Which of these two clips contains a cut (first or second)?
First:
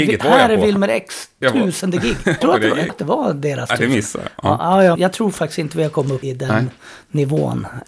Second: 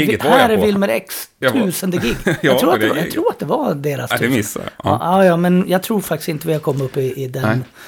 first